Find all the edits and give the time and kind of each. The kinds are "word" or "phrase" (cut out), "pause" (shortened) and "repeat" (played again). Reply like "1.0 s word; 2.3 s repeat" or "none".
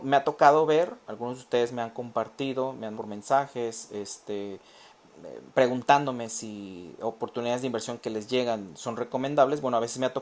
1.0 s word; 2.9 s word